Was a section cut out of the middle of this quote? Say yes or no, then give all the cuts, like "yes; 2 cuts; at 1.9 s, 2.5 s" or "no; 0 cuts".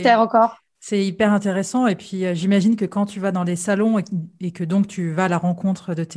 no; 0 cuts